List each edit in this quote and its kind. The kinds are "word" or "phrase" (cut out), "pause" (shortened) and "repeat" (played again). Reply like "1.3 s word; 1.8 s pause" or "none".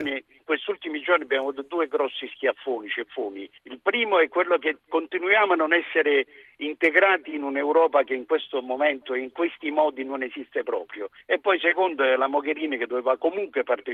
3.6 s pause; 11.2 s pause